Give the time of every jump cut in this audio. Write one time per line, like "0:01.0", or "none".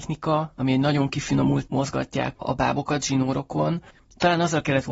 0:01.7
0:02.3